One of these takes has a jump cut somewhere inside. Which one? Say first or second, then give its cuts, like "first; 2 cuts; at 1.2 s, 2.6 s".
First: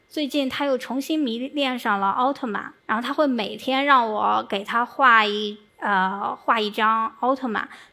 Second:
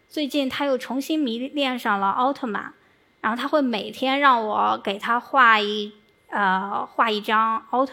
first; 2 cuts; at 2.8 s, 5.7 s